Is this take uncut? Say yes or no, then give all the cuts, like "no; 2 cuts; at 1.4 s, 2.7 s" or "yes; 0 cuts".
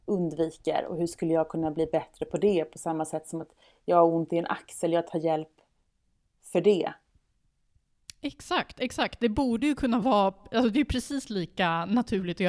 yes; 0 cuts